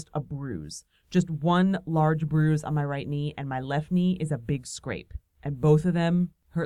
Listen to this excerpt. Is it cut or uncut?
uncut